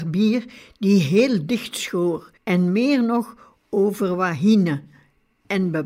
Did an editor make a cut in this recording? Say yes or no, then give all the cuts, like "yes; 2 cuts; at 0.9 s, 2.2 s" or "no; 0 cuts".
yes; 1 cut; at 2.4 s